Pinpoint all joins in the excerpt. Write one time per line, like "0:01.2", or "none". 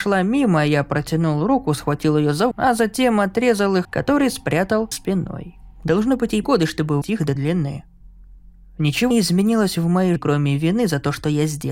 0:02.5
0:03.8
0:04.9
0:06.4
0:07.0
0:07.4
0:09.1
0:10.2